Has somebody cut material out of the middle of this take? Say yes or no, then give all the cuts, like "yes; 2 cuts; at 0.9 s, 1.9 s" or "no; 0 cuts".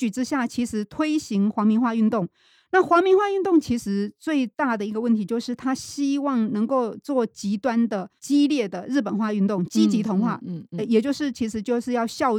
yes; 1 cut; at 8.2 s